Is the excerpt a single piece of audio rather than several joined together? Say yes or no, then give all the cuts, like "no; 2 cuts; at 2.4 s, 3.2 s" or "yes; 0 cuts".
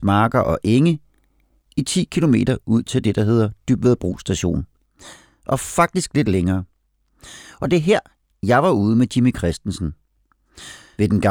yes; 0 cuts